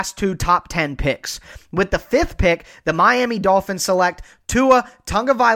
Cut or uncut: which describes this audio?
uncut